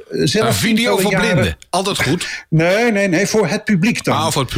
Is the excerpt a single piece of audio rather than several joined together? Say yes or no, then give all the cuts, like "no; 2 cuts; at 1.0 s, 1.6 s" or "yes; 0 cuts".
yes; 0 cuts